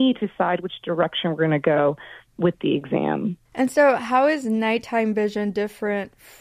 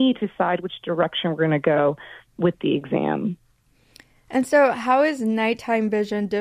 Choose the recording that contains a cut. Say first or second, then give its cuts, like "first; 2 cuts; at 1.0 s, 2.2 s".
first; 1 cut; at 3.5 s